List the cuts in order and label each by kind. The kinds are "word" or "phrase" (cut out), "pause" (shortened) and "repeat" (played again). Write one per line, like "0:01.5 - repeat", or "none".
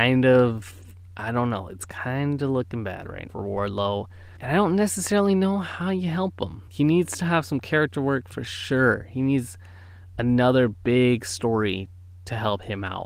0:03.3 - word
0:04.4 - pause
0:06.7 - pause